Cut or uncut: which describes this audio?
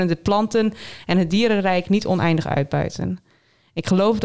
uncut